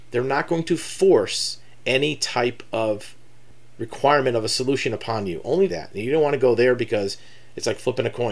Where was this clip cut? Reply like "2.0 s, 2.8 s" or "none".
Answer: 5.7 s